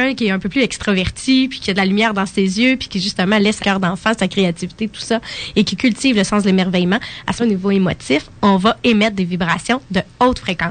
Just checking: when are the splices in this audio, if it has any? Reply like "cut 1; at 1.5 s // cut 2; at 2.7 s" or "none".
cut 1; at 1.6 s // cut 2; at 3.6 s // cut 3; at 7.4 s